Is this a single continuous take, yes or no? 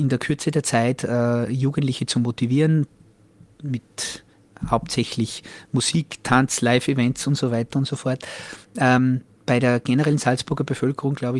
yes